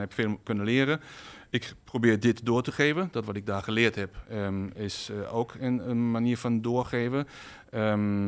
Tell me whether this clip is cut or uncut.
uncut